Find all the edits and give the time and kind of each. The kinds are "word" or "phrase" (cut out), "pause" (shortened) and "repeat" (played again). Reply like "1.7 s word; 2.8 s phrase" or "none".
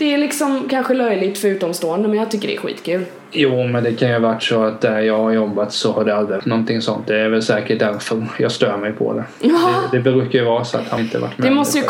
6.4 s word; 11.0 s word